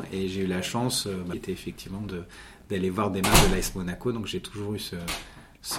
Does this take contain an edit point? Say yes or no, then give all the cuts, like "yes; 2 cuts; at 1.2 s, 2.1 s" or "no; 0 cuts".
yes; 1 cut; at 1.3 s